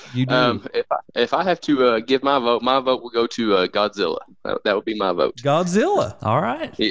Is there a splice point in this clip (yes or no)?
yes